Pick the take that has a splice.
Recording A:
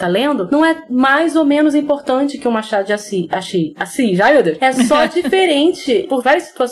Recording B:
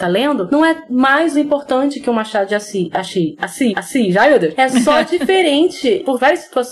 B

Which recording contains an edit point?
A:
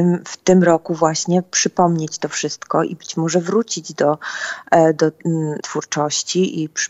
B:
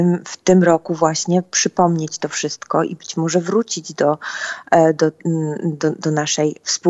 A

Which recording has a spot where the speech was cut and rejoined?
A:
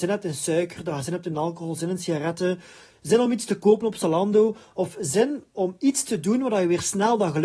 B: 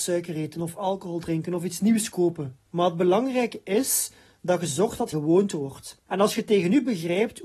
B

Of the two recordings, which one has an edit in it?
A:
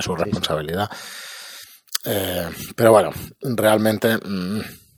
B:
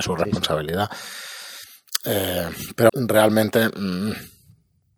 B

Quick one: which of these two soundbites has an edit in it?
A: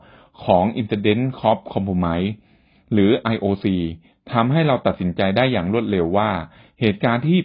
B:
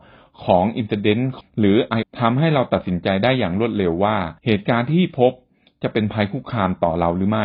B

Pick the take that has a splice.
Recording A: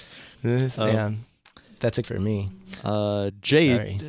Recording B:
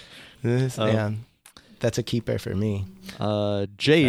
A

